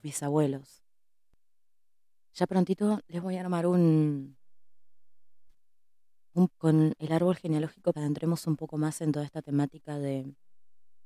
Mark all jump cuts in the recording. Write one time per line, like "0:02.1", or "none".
0:06.5
0:07.9